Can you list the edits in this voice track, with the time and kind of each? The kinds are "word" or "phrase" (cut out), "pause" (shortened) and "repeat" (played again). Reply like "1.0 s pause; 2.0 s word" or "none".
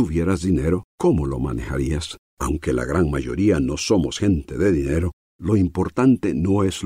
0.9 s pause; 2.3 s pause